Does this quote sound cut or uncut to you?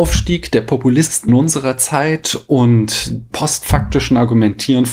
cut